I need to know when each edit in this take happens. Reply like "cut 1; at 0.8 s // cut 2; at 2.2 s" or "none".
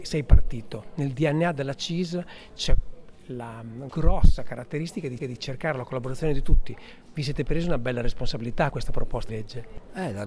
cut 1; at 5.2 s // cut 2; at 8.7 s // cut 3; at 9.3 s